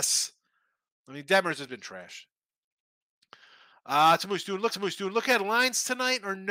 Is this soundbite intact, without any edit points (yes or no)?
no